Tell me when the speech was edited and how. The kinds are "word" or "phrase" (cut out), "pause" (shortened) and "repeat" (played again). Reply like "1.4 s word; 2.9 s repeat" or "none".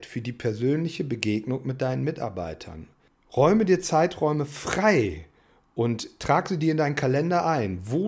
none